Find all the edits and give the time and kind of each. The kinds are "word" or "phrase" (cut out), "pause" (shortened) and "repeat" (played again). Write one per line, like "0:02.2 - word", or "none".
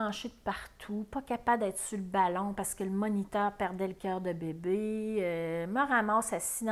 none